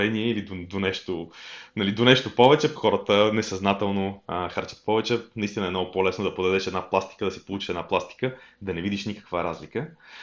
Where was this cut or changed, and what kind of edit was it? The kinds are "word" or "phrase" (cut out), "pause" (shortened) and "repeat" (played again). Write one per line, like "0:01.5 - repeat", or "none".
0:02.8 - word

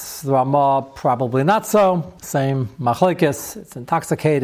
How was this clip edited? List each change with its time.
0:02.2 - pause

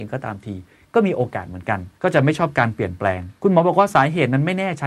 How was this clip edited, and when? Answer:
0:02.0 - pause
0:03.4 - pause

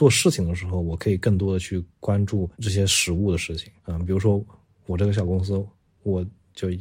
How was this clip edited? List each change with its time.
0:02.5 - pause
0:03.8 - pause

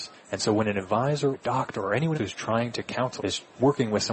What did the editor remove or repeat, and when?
0:01.3 - word
0:02.1 - word
0:03.2 - word

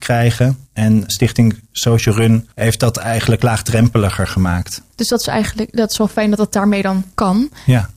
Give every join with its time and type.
0:01.1 - word

